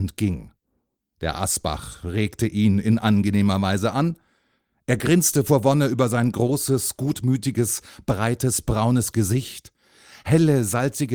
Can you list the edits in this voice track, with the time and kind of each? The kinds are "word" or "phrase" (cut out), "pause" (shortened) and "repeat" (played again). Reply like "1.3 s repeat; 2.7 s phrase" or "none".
none